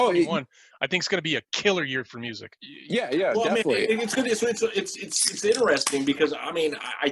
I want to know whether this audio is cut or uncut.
uncut